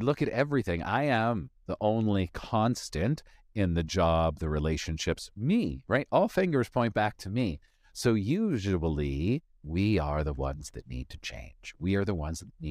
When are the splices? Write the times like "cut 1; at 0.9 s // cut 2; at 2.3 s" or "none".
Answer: none